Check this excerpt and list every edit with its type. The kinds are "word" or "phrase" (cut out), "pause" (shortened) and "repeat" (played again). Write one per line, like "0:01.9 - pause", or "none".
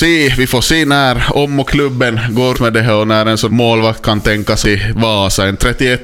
0:01.7 - word
0:02.5 - word
0:03.5 - word
0:04.6 - word